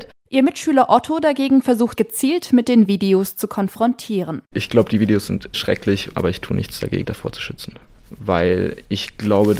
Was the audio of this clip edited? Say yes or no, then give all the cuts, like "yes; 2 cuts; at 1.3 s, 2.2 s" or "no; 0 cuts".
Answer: yes; 4 cuts; at 2.0 s, 5.5 s, 7.0 s, 8.0 s